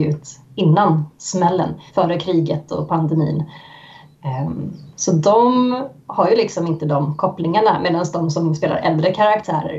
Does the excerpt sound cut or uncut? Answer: cut